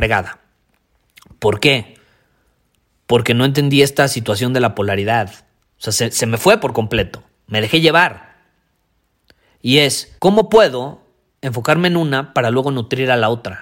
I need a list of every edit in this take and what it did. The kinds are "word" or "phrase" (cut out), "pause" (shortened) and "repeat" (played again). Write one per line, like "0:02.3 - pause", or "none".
0:05.6 - pause
0:10.2 - pause
0:11.3 - pause